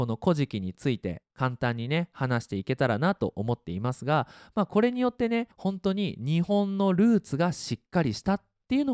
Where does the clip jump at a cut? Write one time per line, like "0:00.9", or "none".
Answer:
0:01.3
0:05.5